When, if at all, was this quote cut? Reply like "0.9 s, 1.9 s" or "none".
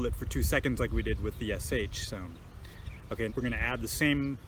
3.3 s

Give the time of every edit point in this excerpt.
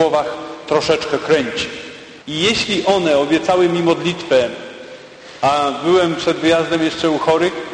2.2 s

